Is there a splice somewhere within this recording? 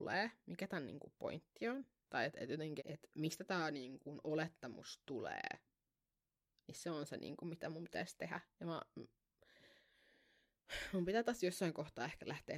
yes; 1 cut; at 2.8 s

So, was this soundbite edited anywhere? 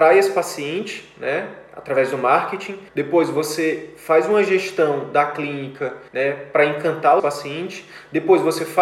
yes; 3 cuts; at 2.9 s, 6.1 s, 7.2 s

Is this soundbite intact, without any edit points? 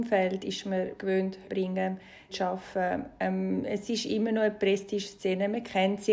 no; 3 cuts; at 1.0 s, 1.4 s, 2.3 s

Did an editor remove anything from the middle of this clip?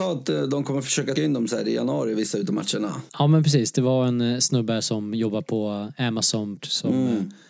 yes; 3 cuts; at 1.2 s, 3.1 s, 6.6 s

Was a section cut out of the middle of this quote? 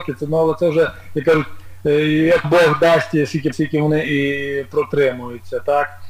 yes; 2 cuts; at 2.4 s, 3.5 s

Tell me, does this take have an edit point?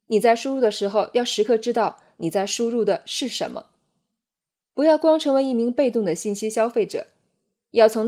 no; 0 cuts

